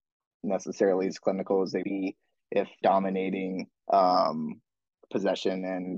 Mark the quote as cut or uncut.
cut